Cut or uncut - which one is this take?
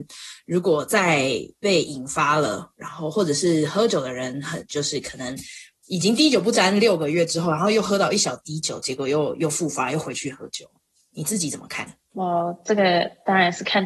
uncut